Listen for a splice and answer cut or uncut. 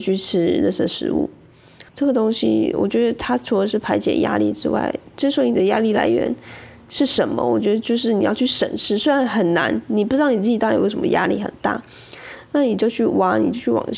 cut